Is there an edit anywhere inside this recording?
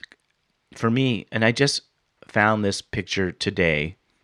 no; 0 cuts

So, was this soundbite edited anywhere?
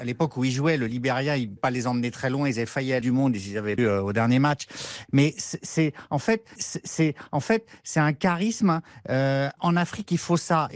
yes; 5 cuts; at 1.6 s, 3.0 s, 3.8 s, 6.6 s, 9.6 s

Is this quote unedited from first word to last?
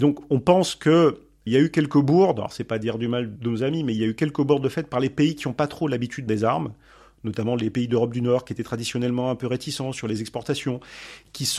no; 3 cuts; at 1.5 s, 3.4 s, 6.3 s

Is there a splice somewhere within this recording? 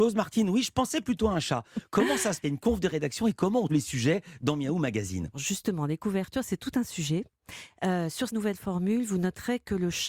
yes; 4 cuts; at 2.4 s, 3.7 s, 5.3 s, 8.3 s

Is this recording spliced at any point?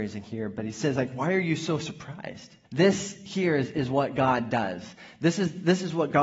yes; 1 cut; at 2.6 s

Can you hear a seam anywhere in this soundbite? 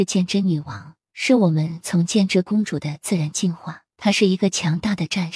yes; 2 cuts; at 1.0 s, 3.9 s

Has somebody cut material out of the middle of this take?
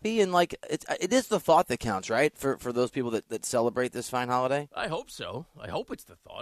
no; 0 cuts

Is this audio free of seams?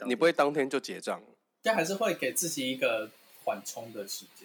yes; 0 cuts

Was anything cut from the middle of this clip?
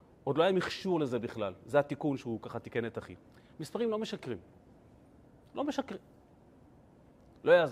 no; 0 cuts

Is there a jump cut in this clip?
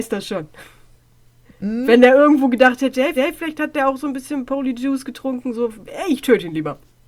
yes; 1 cut; at 3.2 s

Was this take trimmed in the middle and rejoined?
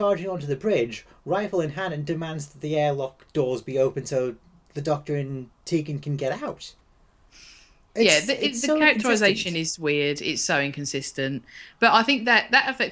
no; 0 cuts

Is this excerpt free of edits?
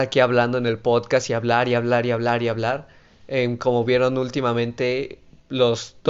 yes; 0 cuts

